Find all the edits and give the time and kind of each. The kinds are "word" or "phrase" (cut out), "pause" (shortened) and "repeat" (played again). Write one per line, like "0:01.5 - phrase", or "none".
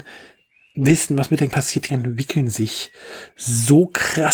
0:01.5 - word
0:01.9 - word

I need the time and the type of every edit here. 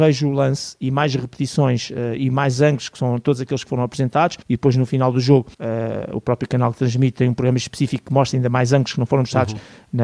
0:04.4 - pause
0:05.5 - pause

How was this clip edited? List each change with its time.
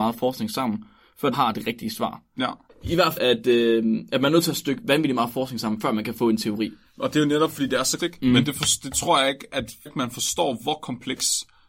0:01.3 - word
0:03.2 - word
0:08.0 - word
0:09.9 - phrase

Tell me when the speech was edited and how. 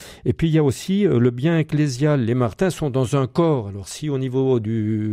none

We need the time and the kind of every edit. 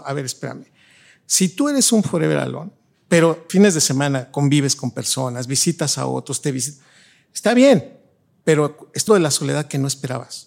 0:03.5 - word
0:09.1 - word

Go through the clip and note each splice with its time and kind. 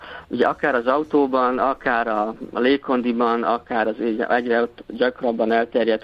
none

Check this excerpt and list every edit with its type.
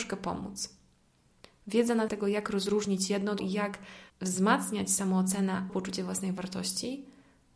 0:02.1 - word
0:03.4 - word
0:04.1 - pause
0:05.7 - word

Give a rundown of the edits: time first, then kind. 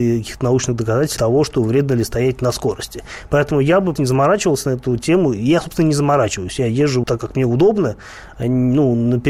0:01.2 - word
0:04.0 - word
0:07.0 - word

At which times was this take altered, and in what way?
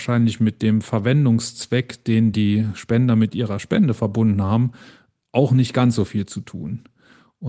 none

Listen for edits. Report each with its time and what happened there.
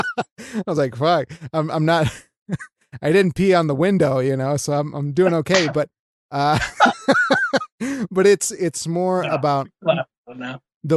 none

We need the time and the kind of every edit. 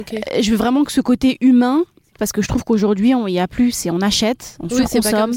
0:02.1 - word

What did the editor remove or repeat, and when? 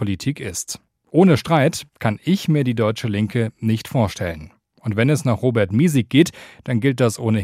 none

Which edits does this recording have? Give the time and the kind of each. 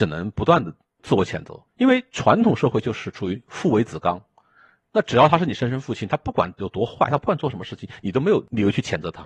0:01.7 - pause

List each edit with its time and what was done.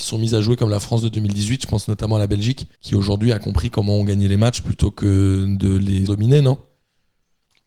0:02.8 - pause
0:06.1 - word

